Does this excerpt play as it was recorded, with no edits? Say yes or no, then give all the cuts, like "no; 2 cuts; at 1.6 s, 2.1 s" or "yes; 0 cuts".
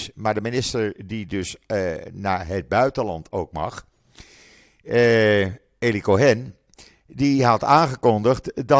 yes; 0 cuts